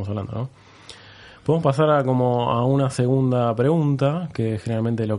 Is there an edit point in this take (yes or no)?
no